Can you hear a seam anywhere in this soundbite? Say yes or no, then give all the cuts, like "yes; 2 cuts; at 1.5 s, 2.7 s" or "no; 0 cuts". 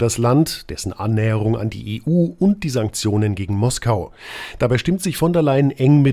no; 0 cuts